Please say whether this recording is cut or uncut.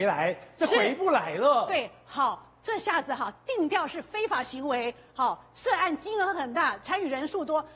uncut